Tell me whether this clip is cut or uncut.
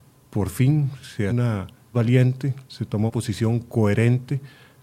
cut